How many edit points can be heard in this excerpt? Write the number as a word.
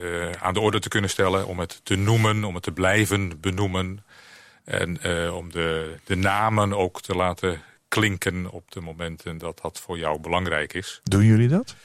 zero